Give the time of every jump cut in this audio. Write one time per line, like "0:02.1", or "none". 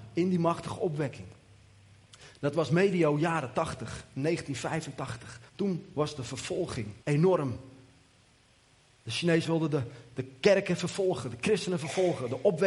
0:05.5
0:07.0
0:09.4